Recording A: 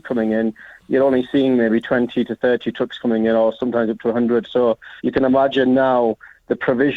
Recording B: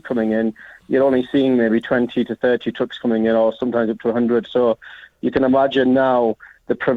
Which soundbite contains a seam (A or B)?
A